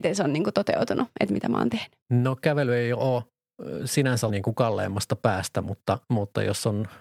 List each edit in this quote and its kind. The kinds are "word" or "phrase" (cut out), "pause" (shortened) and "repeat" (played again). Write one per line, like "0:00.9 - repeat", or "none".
0:02.0 - pause
0:04.3 - word